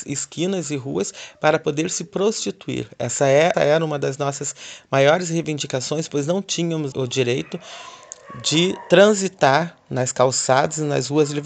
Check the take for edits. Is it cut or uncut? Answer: cut